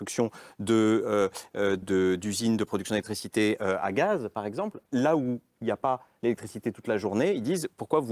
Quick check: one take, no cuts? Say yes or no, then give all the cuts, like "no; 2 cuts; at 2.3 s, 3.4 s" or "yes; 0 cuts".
no; 1 cut; at 1.8 s